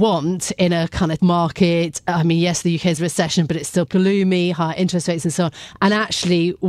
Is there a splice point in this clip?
yes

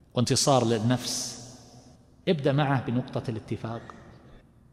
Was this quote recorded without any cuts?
yes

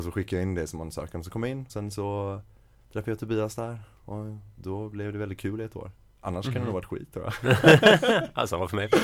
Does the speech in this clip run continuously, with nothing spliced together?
no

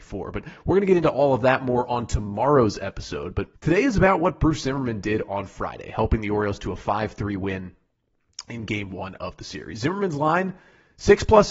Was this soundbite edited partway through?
yes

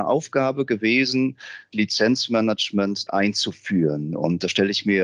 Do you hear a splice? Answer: yes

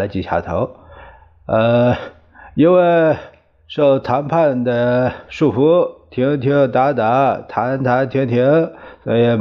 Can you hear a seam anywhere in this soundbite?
no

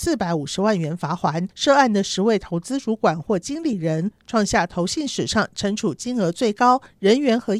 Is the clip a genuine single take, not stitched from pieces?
no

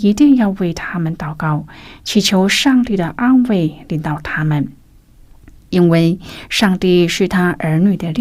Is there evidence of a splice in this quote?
no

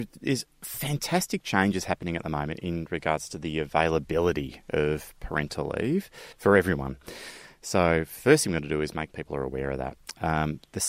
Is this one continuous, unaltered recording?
no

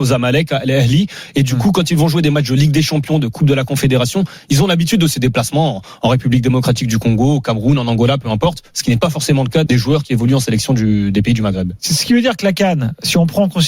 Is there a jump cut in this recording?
yes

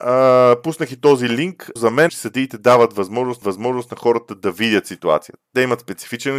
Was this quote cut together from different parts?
yes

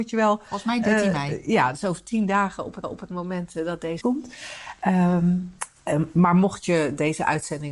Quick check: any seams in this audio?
yes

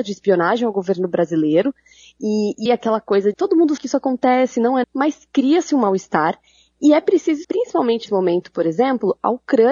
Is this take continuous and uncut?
no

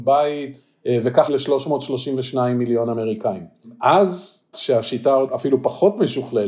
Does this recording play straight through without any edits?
no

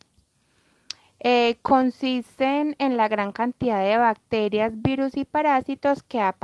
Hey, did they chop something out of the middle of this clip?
no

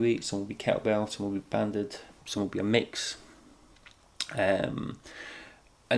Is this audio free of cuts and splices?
yes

